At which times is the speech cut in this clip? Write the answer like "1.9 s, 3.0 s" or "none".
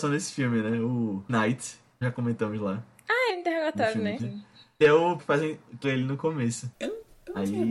1.3 s, 2.0 s, 3.3 s, 4.2 s, 4.8 s, 5.2 s, 5.8 s